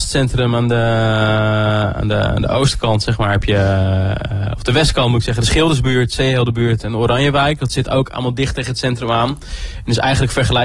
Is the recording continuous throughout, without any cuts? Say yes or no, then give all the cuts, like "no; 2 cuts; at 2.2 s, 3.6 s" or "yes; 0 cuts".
yes; 0 cuts